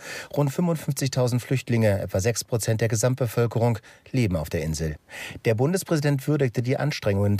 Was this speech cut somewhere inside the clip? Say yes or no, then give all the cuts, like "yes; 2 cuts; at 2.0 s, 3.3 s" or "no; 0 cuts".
no; 0 cuts